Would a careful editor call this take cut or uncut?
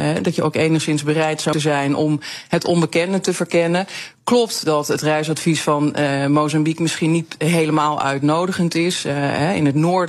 cut